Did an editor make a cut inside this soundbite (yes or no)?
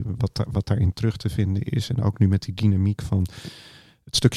no